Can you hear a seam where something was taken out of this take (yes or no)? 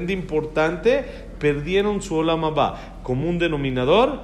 no